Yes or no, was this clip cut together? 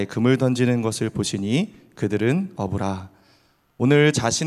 no